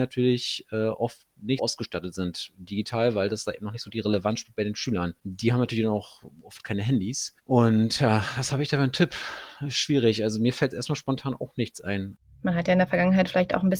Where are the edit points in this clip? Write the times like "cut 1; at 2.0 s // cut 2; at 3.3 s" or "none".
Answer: cut 1; at 1.6 s // cut 2; at 7.4 s // cut 3; at 10.7 s